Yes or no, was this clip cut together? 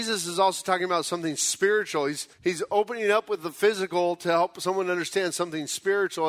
yes